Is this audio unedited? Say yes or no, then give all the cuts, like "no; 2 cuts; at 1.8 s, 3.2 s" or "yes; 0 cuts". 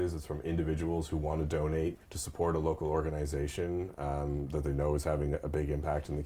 no; 1 cut; at 2.0 s